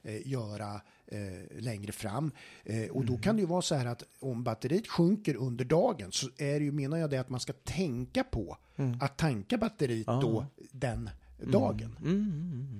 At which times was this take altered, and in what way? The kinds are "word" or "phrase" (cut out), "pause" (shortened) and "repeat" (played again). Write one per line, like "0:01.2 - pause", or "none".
none